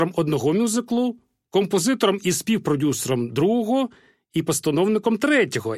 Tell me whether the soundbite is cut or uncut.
uncut